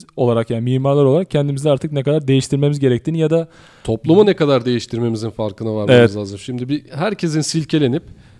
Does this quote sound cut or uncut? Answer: uncut